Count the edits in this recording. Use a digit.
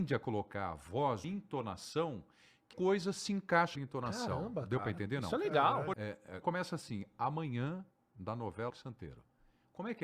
6